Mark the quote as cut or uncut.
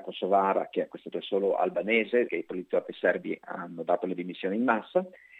cut